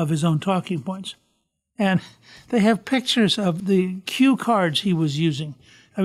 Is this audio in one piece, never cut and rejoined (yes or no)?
yes